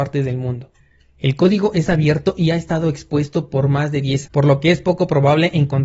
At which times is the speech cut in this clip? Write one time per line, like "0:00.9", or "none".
0:04.3